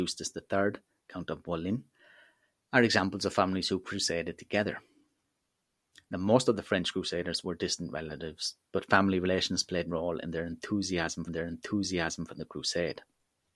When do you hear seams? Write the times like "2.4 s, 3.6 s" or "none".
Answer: 9.9 s, 11.3 s